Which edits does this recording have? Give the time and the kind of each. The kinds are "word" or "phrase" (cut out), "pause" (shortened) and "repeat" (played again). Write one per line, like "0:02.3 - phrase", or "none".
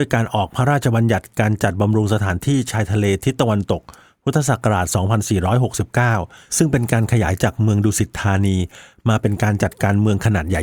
none